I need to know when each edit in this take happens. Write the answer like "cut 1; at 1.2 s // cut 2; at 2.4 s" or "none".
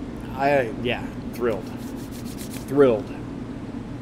cut 1; at 1.3 s